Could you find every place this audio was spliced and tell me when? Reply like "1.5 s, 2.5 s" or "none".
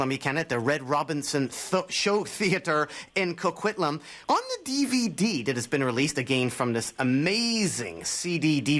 4.2 s